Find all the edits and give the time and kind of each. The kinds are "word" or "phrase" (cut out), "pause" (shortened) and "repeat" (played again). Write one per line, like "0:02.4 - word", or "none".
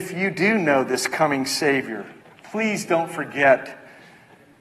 0:02.2 - pause

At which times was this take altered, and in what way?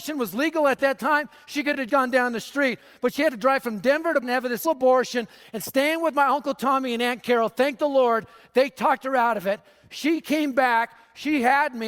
0:01.9 - word
0:04.2 - word
0:04.6 - word

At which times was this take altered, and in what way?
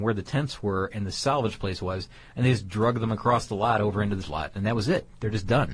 0:04.2 - word

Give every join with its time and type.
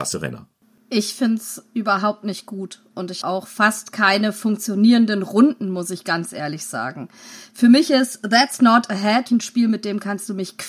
0:03.2 - word
0:09.3 - word

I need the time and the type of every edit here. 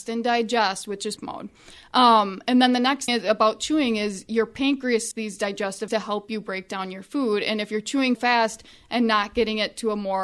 0:01.2 - word
0:03.1 - word
0:05.1 - word
0:05.9 - word
0:08.1 - word

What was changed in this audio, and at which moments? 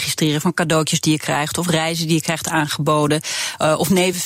none

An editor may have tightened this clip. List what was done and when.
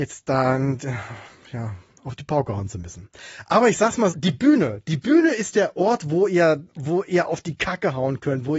0:04.1 - word
0:06.7 - pause

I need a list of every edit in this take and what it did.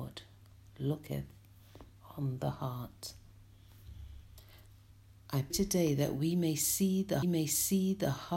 0:05.5 - word
0:07.2 - repeat

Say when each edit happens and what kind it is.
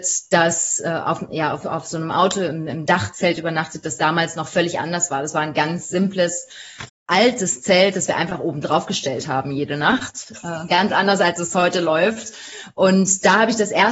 0:06.9 - word

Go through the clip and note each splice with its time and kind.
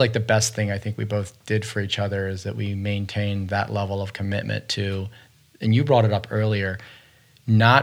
none

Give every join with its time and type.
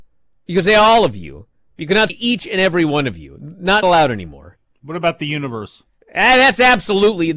0:02.1 - word
0:03.8 - word
0:06.0 - pause

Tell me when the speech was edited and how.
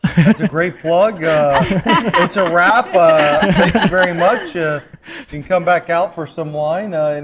none

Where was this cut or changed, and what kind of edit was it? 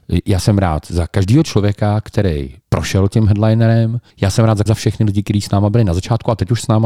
0:02.6 - pause
0:04.1 - pause
0:04.7 - phrase

